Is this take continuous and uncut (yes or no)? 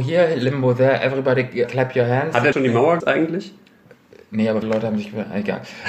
no